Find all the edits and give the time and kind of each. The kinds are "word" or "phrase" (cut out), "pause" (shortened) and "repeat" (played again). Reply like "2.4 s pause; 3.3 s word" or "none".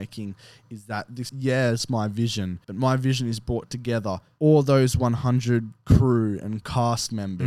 1.3 s word; 2.6 s pause; 4.4 s word